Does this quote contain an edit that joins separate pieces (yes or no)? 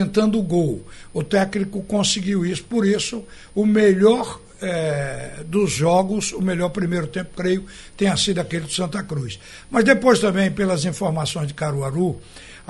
no